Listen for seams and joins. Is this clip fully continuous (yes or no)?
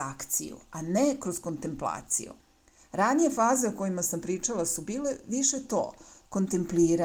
yes